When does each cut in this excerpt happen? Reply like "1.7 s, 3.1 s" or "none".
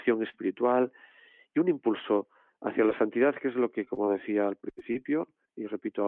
none